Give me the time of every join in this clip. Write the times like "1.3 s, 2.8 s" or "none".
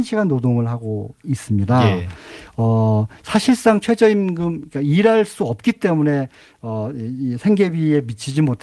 none